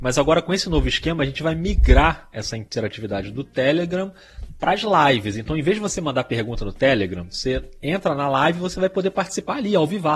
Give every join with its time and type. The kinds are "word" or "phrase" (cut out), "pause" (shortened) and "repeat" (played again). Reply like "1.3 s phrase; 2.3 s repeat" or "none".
none